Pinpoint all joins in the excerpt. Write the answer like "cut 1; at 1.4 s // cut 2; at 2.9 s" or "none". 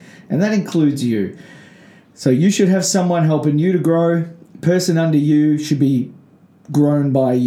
none